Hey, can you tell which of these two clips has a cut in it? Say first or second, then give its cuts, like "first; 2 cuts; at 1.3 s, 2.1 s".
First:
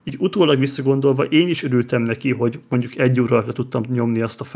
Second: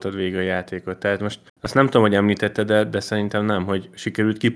second; 1 cut; at 1.5 s